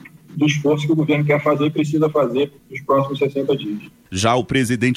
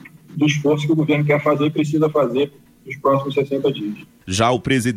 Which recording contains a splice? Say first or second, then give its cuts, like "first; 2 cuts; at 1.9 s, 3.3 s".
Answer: first; 1 cut; at 2.6 s